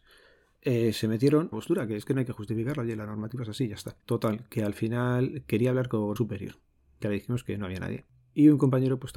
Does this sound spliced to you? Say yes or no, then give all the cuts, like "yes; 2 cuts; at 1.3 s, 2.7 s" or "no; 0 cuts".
yes; 3 cuts; at 1.5 s, 4.0 s, 6.2 s